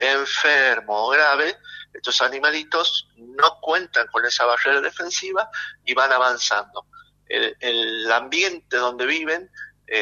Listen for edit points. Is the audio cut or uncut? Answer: uncut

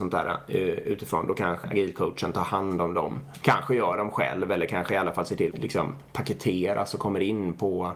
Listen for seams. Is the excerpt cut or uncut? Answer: cut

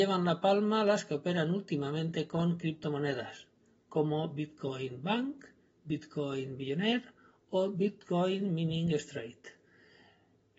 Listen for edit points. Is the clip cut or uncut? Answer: uncut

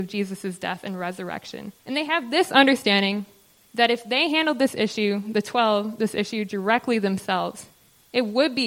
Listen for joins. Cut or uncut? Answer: cut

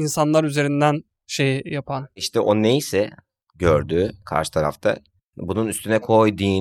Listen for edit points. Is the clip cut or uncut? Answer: uncut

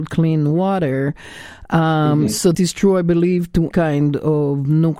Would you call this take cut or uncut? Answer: cut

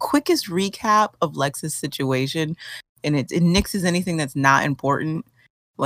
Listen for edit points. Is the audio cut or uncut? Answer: cut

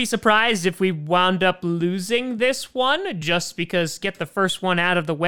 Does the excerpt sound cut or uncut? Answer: uncut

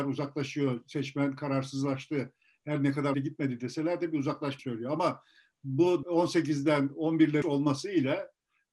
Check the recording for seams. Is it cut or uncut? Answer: cut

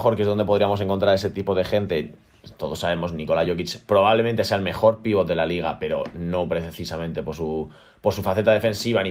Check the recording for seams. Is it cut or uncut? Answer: uncut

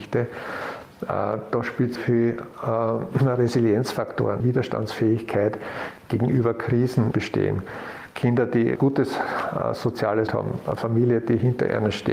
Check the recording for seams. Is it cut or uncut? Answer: cut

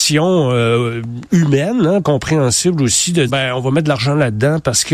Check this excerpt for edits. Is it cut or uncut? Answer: cut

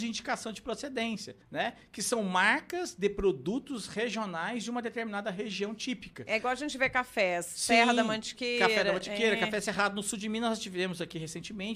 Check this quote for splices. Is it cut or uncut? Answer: cut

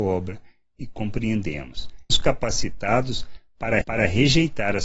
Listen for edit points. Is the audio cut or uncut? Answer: cut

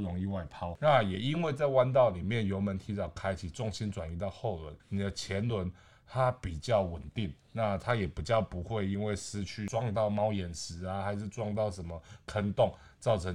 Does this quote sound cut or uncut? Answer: cut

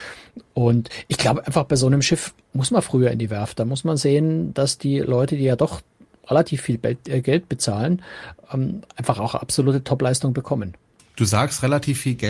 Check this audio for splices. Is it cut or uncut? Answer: uncut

